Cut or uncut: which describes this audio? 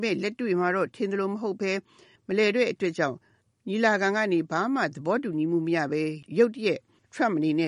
uncut